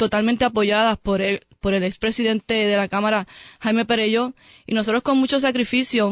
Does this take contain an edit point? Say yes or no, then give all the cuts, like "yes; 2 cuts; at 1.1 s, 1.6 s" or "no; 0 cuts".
no; 0 cuts